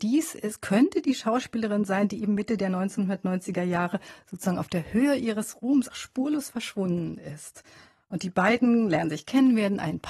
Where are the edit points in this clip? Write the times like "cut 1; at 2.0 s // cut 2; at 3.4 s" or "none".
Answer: cut 1; at 5.9 s

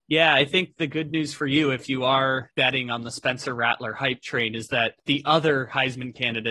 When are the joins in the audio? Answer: none

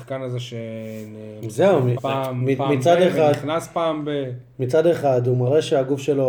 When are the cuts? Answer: cut 1; at 2.0 s

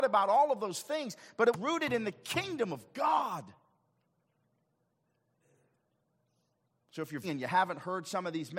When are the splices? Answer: cut 1; at 1.5 s // cut 2; at 7.2 s

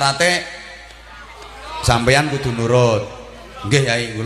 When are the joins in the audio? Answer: none

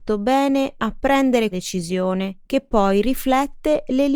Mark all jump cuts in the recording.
cut 1; at 1.5 s // cut 2; at 2.4 s

